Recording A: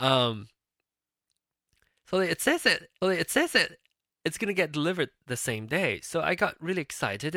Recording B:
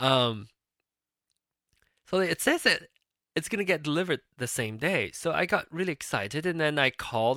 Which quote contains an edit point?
A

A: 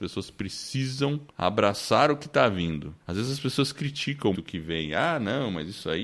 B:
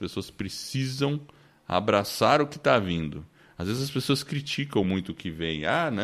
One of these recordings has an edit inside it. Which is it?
A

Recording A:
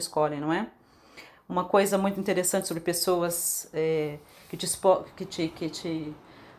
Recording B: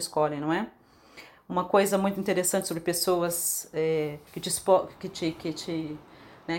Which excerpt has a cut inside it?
B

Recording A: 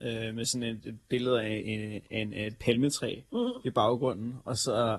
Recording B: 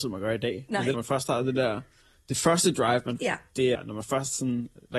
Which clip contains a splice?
B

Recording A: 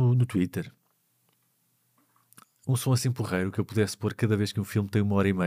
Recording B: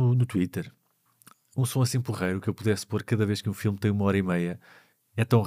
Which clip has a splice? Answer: B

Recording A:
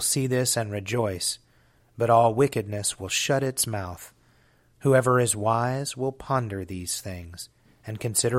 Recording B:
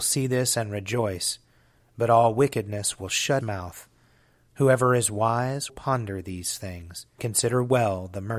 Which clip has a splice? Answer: B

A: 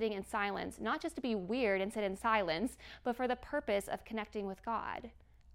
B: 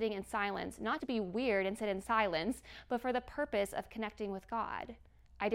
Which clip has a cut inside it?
B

